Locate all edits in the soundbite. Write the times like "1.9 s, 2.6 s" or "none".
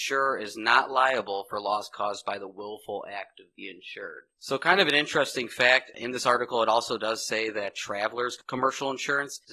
none

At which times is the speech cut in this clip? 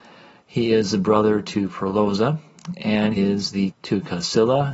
3.2 s, 3.7 s

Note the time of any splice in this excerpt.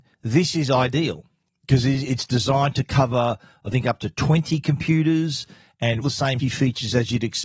6.0 s, 6.4 s

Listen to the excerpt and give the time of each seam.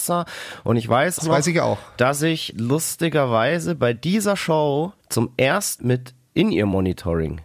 1.2 s, 2.5 s, 5.0 s, 5.8 s

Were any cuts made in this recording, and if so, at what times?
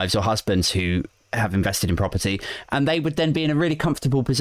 none

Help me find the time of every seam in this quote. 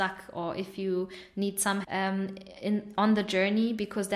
1.8 s

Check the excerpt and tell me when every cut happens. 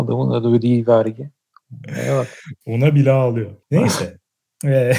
2.6 s, 3.6 s

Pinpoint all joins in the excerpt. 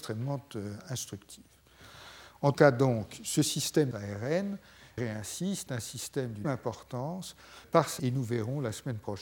2.5 s, 3.9 s, 5.0 s, 5.7 s, 6.4 s, 7.6 s, 8.0 s

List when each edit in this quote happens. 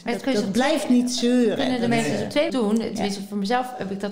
2.5 s

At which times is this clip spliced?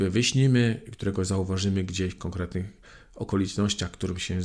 none

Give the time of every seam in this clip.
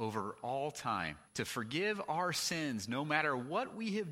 1.3 s

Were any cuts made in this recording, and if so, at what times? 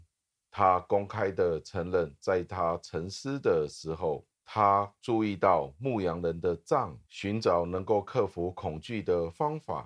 4.3 s, 7.1 s

